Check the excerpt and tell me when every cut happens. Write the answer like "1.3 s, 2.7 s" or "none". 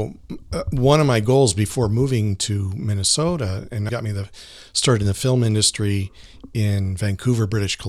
3.9 s